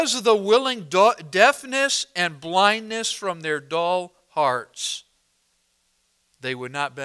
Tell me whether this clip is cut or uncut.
cut